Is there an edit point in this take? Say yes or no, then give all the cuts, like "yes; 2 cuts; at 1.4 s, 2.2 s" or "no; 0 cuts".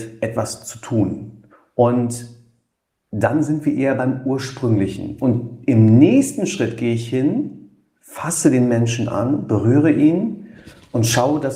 yes; 1 cut; at 1.5 s